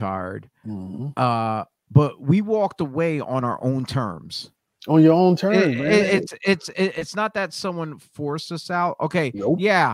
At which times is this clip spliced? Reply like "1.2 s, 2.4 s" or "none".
none